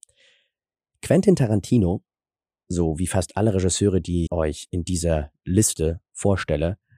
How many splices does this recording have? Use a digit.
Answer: 2